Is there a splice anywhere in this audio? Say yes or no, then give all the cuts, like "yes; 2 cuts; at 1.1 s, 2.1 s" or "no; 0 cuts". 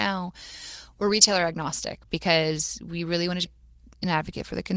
yes; 1 cut; at 3.5 s